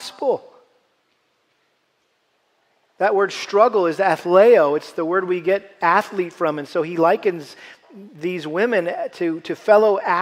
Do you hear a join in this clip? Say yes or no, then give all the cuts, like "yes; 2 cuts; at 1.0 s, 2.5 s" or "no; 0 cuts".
no; 0 cuts